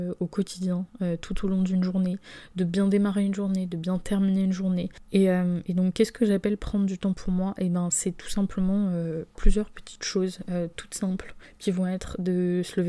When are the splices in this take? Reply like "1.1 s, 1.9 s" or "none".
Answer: none